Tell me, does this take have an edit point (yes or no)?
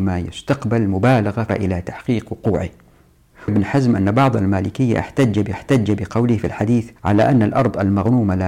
yes